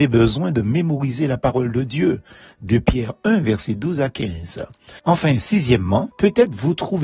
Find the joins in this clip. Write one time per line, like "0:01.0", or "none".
0:05.0